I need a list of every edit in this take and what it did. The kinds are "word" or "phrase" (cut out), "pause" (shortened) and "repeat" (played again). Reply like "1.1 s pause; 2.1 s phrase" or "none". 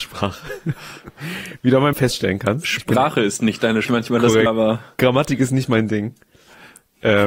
1.9 s word; 3.8 s phrase; 4.5 s word